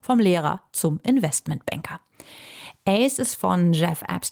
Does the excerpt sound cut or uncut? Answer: uncut